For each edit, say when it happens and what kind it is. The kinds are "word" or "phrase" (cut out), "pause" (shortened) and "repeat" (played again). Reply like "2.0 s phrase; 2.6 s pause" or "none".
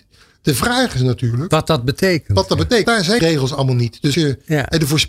2.8 s word; 3.2 s word; 4.1 s word